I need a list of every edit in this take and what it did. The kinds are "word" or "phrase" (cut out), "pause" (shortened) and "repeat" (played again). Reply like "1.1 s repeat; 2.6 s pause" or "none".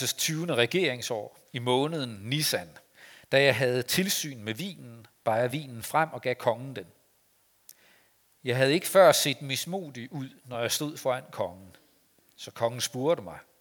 none